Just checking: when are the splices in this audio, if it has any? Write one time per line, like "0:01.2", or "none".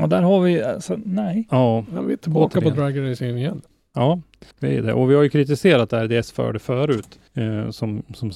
0:04.5
0:07.3